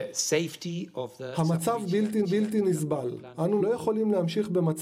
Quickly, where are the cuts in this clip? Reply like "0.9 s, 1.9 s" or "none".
2.2 s, 3.6 s